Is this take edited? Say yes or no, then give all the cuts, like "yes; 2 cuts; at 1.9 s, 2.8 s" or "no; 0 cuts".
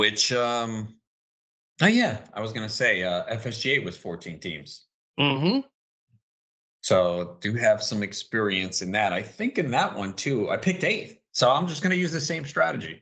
no; 0 cuts